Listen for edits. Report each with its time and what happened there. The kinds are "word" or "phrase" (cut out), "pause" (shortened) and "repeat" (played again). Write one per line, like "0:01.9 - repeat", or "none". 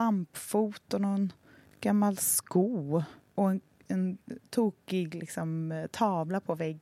none